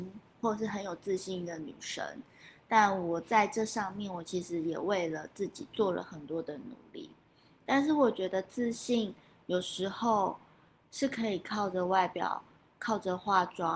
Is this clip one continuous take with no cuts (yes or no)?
yes